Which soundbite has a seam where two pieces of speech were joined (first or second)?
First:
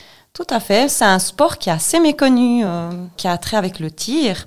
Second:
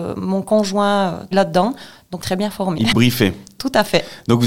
second